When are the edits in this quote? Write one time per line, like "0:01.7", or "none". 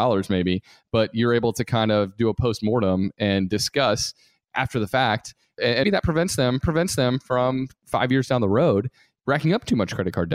0:05.8
0:06.6